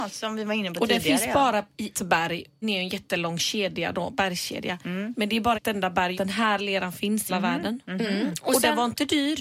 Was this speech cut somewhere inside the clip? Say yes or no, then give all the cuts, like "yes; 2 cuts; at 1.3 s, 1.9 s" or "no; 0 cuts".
yes; 5 cuts; at 1.9 s, 2.6 s, 5.5 s, 6.1 s, 7.3 s